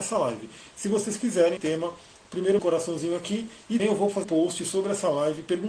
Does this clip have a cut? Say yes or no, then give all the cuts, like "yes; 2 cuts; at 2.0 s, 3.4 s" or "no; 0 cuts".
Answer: yes; 4 cuts; at 1.6 s, 2.6 s, 3.8 s, 4.2 s